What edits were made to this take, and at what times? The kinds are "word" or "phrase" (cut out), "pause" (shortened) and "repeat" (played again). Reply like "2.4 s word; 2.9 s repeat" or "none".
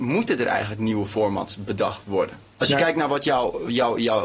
2.5 s pause